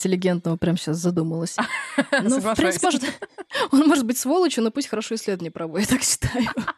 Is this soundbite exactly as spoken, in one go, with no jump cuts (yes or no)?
no